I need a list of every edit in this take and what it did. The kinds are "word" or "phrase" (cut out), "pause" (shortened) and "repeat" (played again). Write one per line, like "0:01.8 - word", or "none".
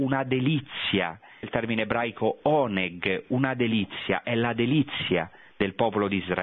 0:01.4 - word